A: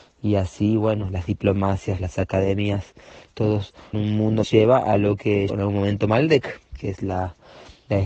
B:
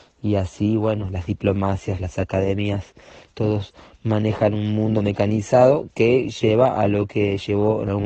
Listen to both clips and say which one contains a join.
A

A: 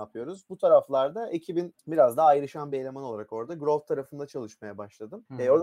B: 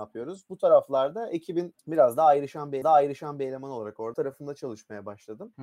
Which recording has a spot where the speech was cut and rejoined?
B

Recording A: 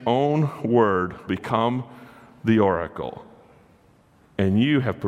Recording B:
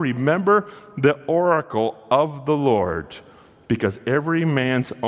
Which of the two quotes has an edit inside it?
A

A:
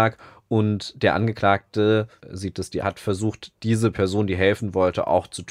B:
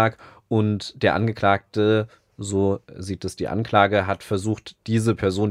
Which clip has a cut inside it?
A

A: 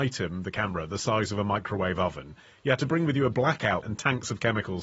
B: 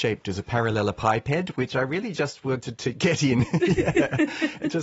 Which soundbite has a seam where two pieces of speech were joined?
A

